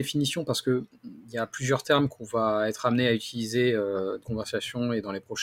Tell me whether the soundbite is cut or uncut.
cut